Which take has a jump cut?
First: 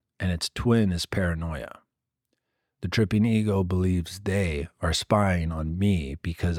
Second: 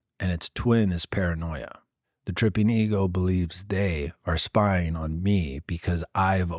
second; 1 cut; at 2.0 s

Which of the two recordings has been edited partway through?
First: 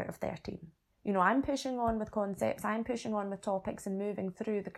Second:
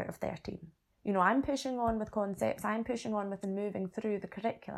second; 1 cut; at 3.4 s

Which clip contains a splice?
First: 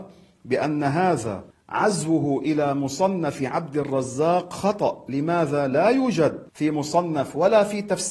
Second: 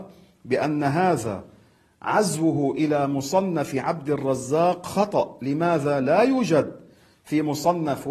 first; 2 cuts; at 1.5 s, 6.5 s

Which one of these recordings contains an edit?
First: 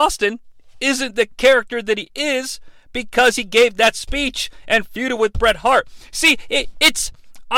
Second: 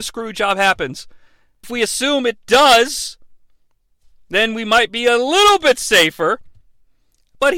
second; 1 cut; at 1.6 s

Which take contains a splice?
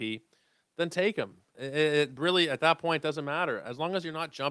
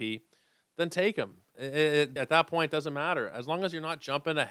second; 1 cut; at 2.2 s

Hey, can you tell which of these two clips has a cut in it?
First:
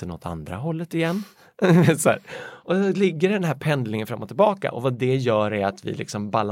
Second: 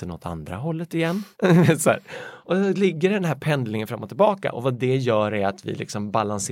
second; 1 cut; at 1.3 s

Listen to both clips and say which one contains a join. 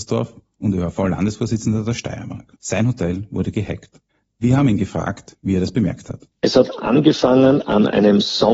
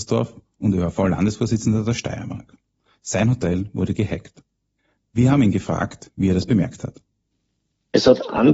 first; 3 cuts; at 2.6 s, 4.1 s, 6.3 s

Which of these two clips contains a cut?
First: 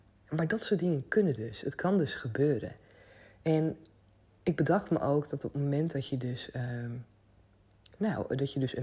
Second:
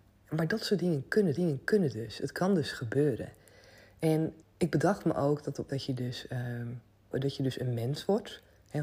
second; 4 cuts; at 1.4 s, 4.4 s, 5.7 s, 7.1 s

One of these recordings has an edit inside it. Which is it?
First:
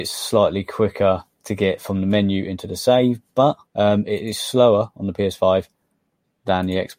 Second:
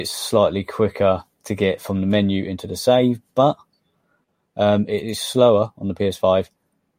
first; 1 cut; at 3.7 s

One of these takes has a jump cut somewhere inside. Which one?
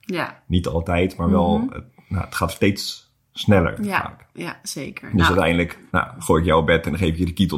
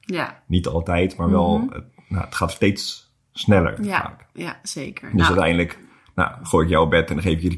first; 1 cut; at 5.9 s

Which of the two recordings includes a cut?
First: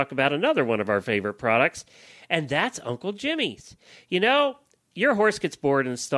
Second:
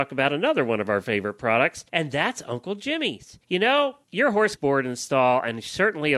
second; 4 cuts; at 1.9 s, 3.4 s, 4.0 s, 4.6 s

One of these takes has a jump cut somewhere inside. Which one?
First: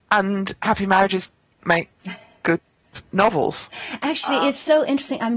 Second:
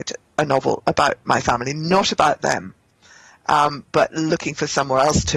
first; 1 cut; at 1.6 s

